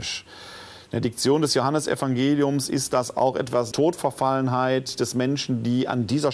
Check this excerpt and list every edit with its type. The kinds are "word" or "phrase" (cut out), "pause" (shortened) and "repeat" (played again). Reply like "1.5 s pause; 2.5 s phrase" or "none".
3.7 s word

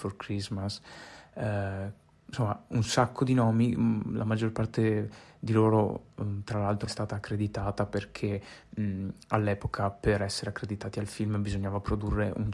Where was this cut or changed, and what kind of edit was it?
6.9 s word

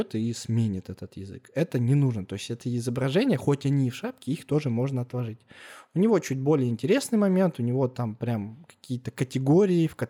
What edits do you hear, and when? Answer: none

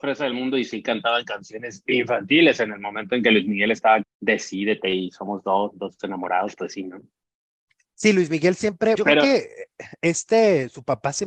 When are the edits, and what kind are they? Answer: 4.0 s word; 9.0 s word

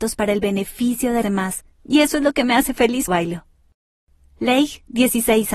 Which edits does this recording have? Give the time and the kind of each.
1.2 s word; 1.7 s pause; 3.1 s word

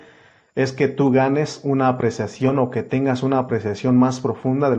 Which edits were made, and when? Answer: none

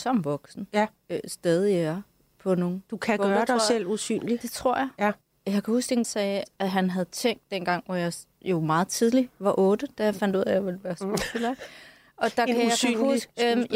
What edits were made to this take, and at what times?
5.2 s pause; 6.0 s phrase

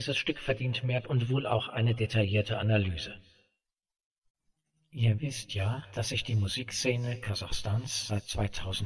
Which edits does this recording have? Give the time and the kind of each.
1.0 s word

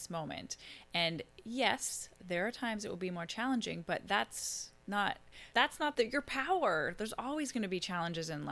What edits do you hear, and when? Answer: 5.5 s word; 5.9 s word

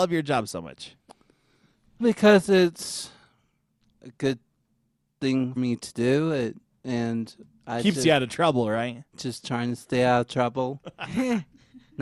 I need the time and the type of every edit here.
2.0 s word; 4.0 s word; 5.6 s word

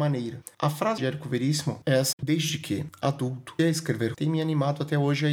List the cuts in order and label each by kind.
1.0 s word; 2.1 s word; 3.6 s word; 4.1 s word

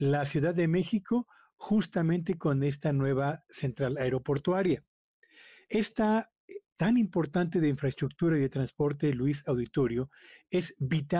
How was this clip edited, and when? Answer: 6.7 s word

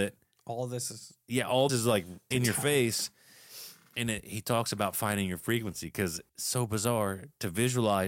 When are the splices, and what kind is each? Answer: 1.7 s word; 2.3 s word; 6.3 s pause

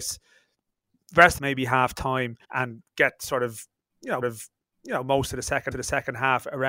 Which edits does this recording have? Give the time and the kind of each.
1.4 s phrase; 2.4 s pause; 4.2 s repeat; 5.7 s repeat

